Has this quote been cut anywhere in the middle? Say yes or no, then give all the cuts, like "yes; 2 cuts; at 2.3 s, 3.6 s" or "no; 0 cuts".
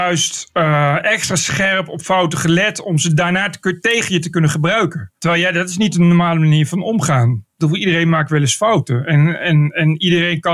yes; 1 cut; at 5.2 s